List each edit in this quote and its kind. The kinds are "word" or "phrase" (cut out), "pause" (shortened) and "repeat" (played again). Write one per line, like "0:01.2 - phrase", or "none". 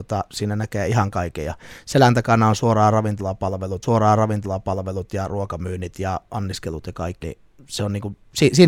0:03.8 - repeat
0:07.2 - word

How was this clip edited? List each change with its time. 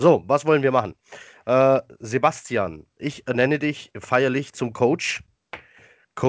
none

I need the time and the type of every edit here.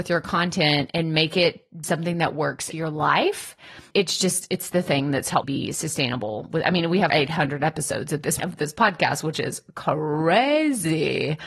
0:01.8 - word
0:02.7 - word
0:03.9 - word
0:05.4 - word
0:07.1 - word
0:08.4 - word

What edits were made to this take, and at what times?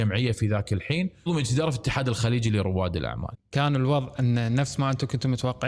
0:01.3 - word

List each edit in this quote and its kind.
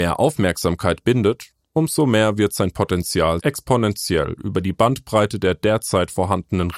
0:01.0 - word
0:03.4 - word

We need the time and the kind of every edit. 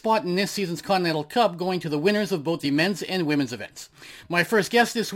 none

